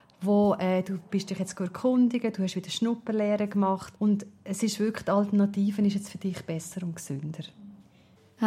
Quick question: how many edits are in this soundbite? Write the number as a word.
one